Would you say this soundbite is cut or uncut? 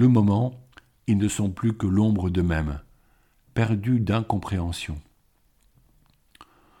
uncut